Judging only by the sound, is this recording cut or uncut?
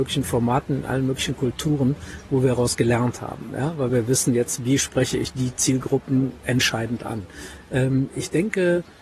uncut